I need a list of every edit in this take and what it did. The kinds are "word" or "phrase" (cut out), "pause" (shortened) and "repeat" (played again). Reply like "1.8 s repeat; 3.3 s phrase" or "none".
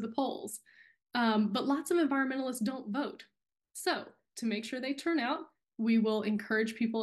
none